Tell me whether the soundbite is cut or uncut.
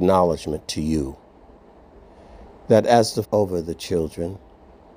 cut